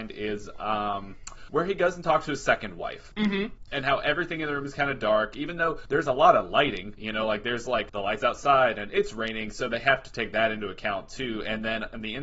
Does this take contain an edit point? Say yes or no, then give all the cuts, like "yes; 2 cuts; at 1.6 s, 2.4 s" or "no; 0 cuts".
no; 0 cuts